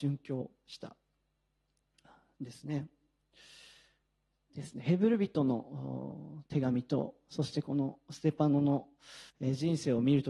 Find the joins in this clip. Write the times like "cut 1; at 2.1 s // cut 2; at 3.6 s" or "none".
cut 1; at 9.3 s